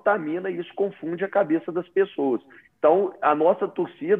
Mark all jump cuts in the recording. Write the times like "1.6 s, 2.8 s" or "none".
none